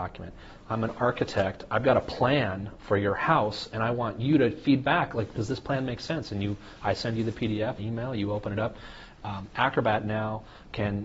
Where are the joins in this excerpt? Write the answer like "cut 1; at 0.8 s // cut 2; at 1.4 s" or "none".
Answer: cut 1; at 7.8 s